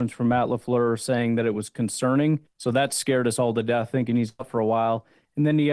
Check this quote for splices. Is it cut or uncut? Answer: uncut